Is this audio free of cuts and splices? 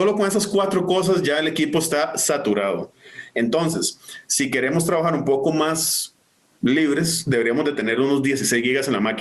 yes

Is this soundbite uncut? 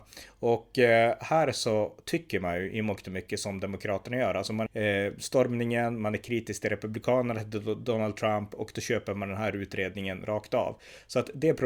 no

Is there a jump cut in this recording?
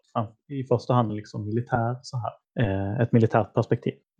yes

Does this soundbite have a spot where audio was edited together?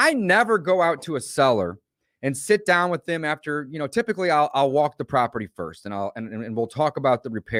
no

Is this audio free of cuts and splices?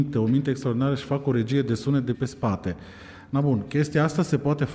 no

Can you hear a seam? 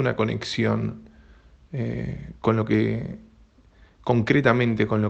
no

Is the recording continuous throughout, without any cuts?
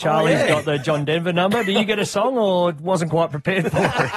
yes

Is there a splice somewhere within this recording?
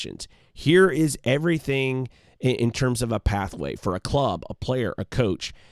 no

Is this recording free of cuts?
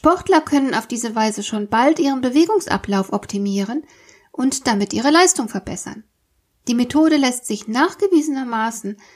yes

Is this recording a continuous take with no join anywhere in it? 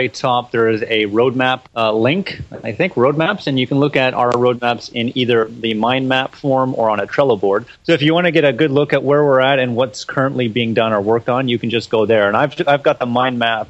no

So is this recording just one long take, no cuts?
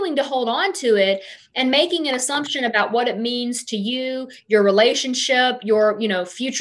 yes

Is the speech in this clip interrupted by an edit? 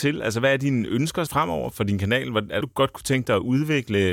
yes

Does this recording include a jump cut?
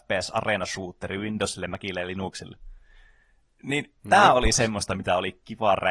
yes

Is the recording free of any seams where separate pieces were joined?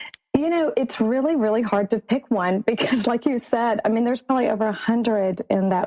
yes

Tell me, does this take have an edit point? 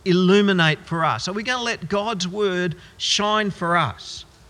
no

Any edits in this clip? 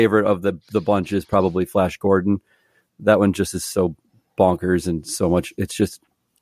no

